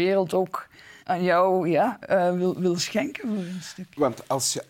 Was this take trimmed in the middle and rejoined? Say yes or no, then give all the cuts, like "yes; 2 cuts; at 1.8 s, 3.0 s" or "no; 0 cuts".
yes; 1 cut; at 1.0 s